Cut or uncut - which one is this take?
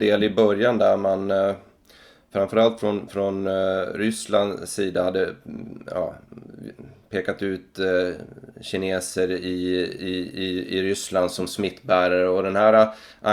uncut